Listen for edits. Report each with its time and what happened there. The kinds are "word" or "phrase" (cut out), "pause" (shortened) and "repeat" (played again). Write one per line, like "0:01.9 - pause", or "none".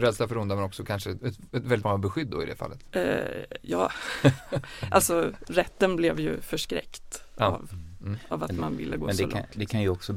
0:01.2 - word
0:01.8 - word
0:05.4 - word

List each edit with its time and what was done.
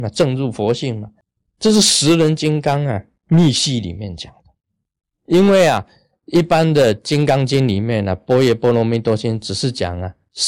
none

